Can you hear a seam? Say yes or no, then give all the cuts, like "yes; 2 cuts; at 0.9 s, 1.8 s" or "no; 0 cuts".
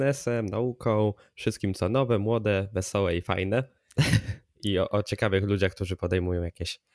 no; 0 cuts